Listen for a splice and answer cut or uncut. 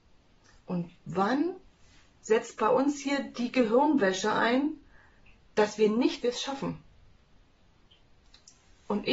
cut